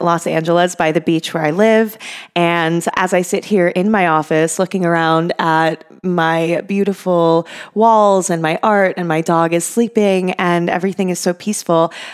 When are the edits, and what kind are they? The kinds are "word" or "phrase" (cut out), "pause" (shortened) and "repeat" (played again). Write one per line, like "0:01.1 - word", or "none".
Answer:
0:02.9 - word